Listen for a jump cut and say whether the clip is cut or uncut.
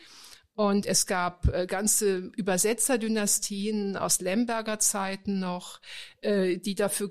uncut